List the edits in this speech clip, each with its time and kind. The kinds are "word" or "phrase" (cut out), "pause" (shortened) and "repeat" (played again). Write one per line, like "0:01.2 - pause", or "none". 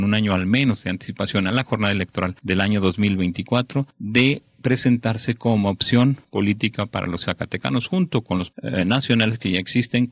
0:07.3 - word
0:08.5 - phrase

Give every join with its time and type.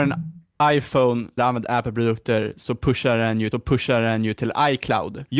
0:01.4 - word
0:03.5 - repeat

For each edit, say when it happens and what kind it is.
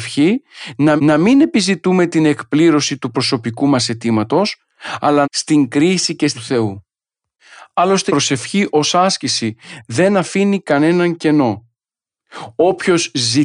0:01.0 - repeat
0:05.2 - phrase
0:06.3 - phrase
0:08.1 - word

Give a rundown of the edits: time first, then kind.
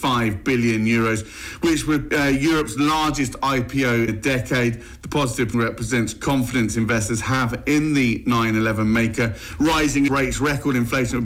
0:02.1 - word
0:04.1 - word
0:05.5 - word
0:10.1 - word

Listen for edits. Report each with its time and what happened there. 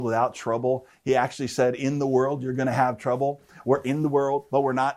none

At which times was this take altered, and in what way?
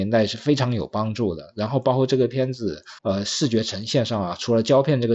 0:03.0 - pause

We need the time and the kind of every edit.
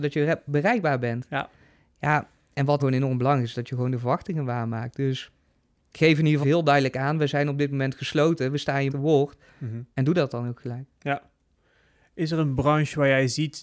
0:02.8 - word
0:06.4 - phrase
0:08.9 - phrase

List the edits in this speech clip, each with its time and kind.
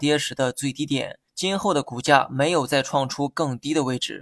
0:01.3 - pause

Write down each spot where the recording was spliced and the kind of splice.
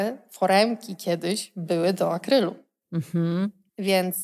none

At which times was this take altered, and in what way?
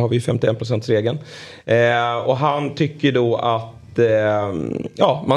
none

